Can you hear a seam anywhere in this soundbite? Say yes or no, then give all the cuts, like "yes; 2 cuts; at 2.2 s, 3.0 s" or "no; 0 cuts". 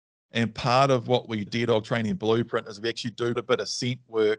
yes; 2 cuts; at 1.5 s, 3.4 s